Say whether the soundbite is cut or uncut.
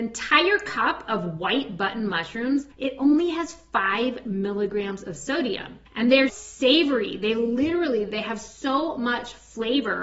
cut